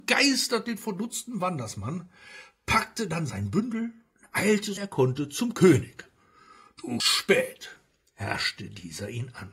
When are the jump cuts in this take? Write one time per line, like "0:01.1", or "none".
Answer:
0:04.8
0:07.0